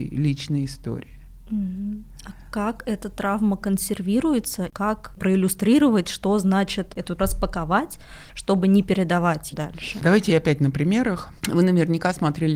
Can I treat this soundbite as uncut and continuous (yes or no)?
no